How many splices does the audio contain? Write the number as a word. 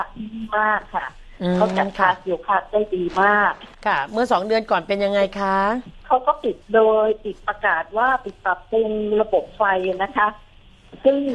three